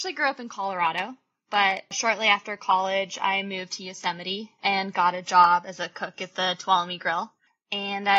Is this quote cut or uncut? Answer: uncut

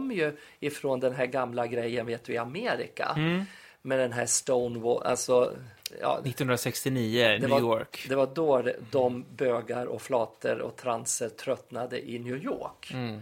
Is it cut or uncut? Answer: uncut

